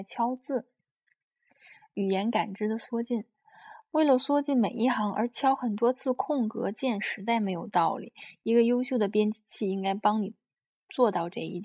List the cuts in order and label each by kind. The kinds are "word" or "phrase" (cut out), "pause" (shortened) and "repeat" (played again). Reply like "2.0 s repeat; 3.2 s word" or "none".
none